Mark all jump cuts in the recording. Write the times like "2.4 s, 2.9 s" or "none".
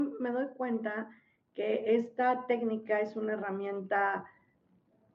none